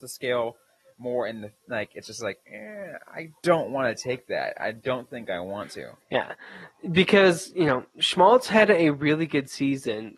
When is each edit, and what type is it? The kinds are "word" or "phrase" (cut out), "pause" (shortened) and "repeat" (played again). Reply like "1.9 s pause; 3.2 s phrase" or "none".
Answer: 2.4 s pause; 3.4 s pause; 6.0 s pause

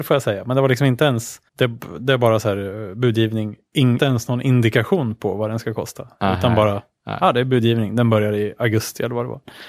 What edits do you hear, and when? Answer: 1.5 s pause; 4.0 s word

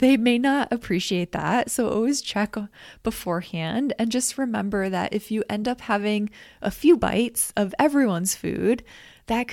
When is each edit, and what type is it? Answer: none

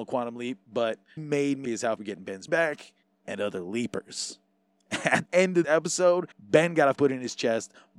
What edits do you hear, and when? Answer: 1.2 s phrase; 1.6 s word; 2.0 s word; 2.5 s word; 3.0 s pause; 5.3 s word; 5.6 s word; 6.3 s pause; 7.0 s word

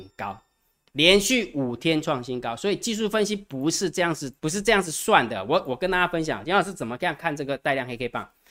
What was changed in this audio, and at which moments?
4.4 s pause

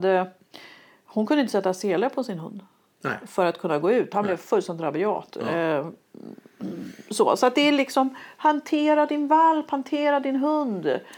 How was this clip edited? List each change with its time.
none

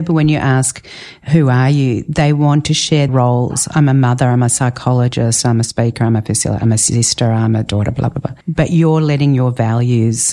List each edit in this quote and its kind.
3.1 s word; 8.4 s pause

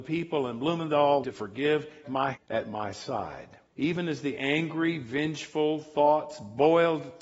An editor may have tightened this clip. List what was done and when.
1.2 s phrase; 2.0 s word; 2.3 s word; 3.7 s pause

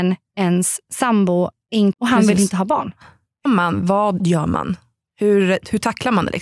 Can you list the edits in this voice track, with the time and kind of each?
1.9 s word; 3.5 s word; 4.2 s word

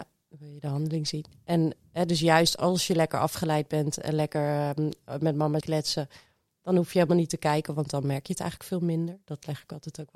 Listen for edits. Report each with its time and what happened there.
5.6 s word

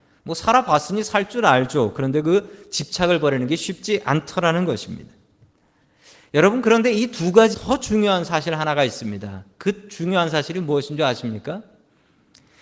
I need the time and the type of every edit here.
7.5 s word

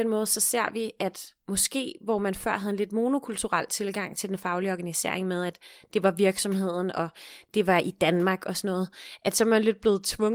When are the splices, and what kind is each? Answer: 1.4 s pause

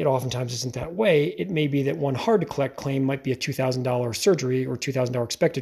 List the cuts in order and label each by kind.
none

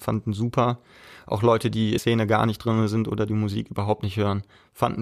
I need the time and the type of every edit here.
2.0 s word

